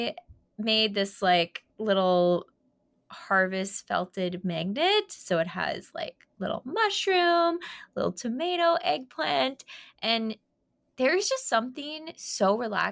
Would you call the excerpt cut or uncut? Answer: uncut